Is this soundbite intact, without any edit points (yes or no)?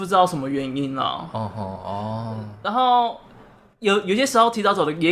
yes